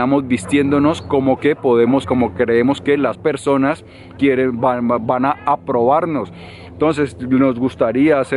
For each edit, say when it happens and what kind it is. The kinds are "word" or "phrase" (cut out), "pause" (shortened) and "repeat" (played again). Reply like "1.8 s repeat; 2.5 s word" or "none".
1.4 s word; 2.0 s word; 3.1 s word; 4.2 s word